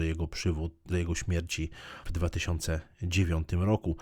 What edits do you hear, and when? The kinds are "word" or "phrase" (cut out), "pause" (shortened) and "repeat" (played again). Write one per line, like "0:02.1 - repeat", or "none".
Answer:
0:00.9 - word
0:02.1 - word